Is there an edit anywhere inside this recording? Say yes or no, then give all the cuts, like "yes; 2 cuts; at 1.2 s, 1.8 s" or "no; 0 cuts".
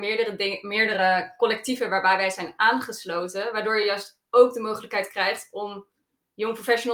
no; 0 cuts